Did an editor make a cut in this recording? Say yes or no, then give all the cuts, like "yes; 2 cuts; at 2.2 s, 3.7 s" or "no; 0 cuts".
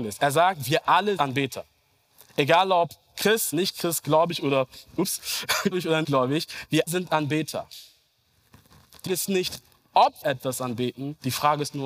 yes; 7 cuts; at 1.2 s, 3.5 s, 5.7 s, 6.0 s, 6.9 s, 9.1 s, 10.2 s